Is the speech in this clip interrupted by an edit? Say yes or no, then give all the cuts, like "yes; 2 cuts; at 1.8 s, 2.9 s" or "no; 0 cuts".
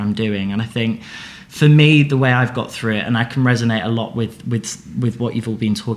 no; 0 cuts